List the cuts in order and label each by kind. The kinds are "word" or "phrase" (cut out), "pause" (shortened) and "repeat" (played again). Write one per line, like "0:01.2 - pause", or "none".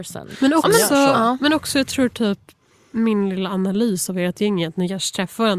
none